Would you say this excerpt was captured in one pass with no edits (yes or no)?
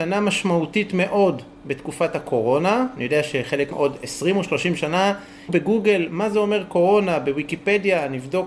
no